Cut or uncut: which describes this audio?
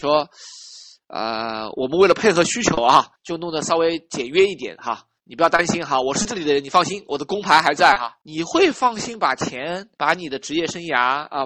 cut